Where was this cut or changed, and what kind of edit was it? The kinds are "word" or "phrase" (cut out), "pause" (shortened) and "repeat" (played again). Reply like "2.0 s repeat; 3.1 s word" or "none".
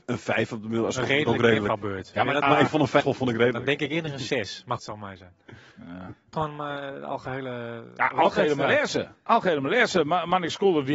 2.4 s word; 3.0 s phrase; 4.8 s phrase; 5.7 s pause; 6.3 s phrase